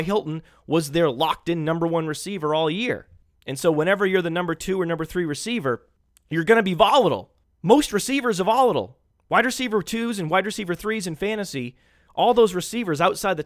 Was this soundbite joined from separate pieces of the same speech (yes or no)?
no